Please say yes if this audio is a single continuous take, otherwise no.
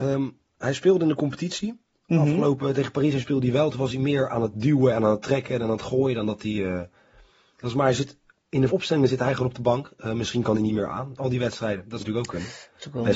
no